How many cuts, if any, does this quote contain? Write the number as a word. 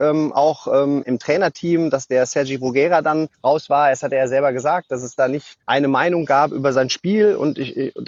three